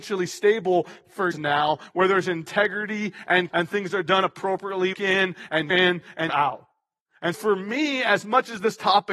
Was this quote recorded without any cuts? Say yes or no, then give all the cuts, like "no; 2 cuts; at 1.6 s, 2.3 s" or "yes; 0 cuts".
no; 6 cuts; at 1.3 s, 3.5 s, 4.9 s, 5.7 s, 6.3 s, 7.3 s